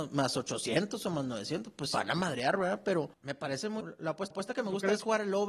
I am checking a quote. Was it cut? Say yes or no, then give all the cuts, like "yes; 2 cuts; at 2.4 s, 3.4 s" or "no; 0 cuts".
yes; 4 cuts; at 1.9 s, 3.1 s, 3.8 s, 4.3 s